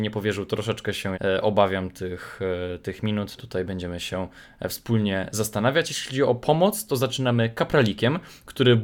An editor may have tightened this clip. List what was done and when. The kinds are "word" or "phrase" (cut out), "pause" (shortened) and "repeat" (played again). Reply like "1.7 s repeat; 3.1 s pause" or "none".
1.1 s word; 3.4 s phrase